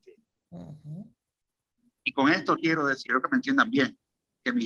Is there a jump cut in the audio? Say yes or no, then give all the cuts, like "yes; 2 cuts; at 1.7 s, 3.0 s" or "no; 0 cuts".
yes; 2 cuts; at 2.6 s, 3.1 s